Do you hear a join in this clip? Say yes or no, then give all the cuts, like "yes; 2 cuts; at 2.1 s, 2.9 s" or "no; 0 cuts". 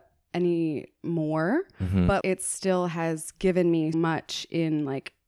yes; 2 cuts; at 2.2 s, 3.9 s